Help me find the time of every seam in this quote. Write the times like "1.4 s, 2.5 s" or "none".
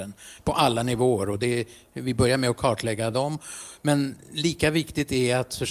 none